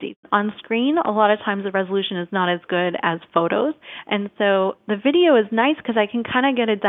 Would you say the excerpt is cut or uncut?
uncut